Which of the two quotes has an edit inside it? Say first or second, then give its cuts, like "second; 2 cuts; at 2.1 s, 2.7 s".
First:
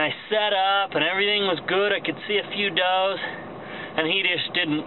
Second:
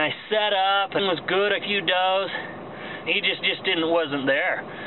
second; 4 cuts; at 1.0 s, 1.6 s, 3.0 s, 3.4 s